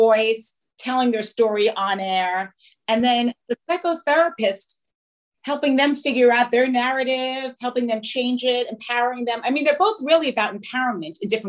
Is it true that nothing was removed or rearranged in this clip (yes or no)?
yes